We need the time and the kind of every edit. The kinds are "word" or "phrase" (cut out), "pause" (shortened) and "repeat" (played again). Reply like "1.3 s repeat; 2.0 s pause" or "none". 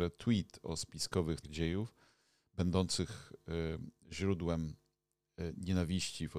1.4 s word